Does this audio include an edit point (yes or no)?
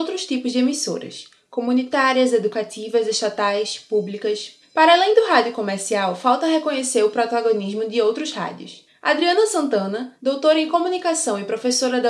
no